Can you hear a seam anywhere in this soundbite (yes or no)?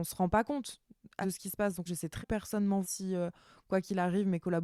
yes